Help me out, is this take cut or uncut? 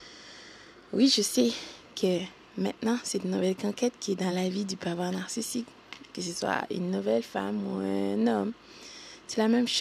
uncut